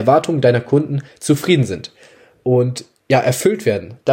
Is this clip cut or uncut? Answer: uncut